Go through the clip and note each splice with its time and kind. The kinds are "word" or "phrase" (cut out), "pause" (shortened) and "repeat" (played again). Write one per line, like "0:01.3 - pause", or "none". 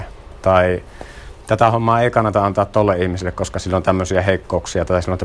none